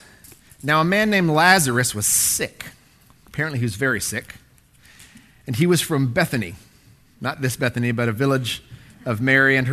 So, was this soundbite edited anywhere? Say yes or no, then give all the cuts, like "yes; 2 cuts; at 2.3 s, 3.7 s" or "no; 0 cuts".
no; 0 cuts